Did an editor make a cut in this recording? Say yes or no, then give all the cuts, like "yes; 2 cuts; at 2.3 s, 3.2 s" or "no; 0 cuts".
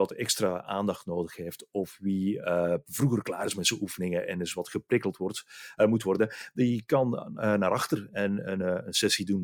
no; 0 cuts